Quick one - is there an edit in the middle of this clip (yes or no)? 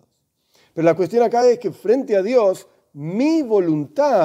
no